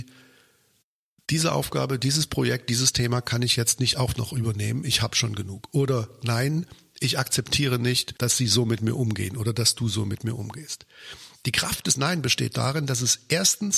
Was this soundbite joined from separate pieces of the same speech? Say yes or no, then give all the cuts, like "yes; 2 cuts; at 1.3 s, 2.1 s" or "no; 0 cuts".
yes; 1 cut; at 8.2 s